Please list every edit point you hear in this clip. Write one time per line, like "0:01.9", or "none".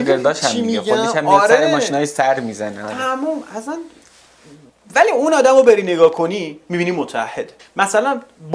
0:04.7
0:07.6